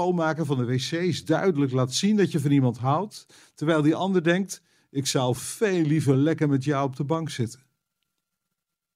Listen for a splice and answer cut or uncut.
uncut